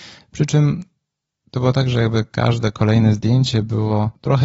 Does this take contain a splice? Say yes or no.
no